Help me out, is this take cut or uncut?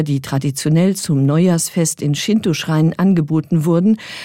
uncut